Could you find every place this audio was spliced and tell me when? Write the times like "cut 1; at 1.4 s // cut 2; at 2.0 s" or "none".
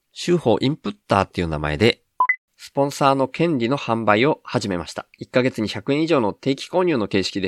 cut 1; at 2.4 s // cut 2; at 5.1 s